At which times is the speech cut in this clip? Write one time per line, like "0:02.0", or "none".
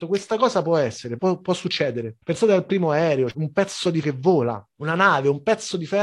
0:01.2
0:02.2
0:03.3
0:04.0
0:04.7